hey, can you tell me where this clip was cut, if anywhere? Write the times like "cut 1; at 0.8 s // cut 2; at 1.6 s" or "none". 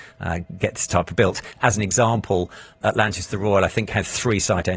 cut 1; at 1.2 s // cut 2; at 2.8 s